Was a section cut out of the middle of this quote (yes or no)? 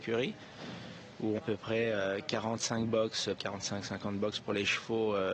yes